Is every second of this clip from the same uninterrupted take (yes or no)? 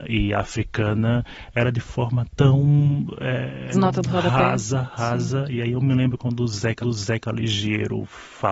no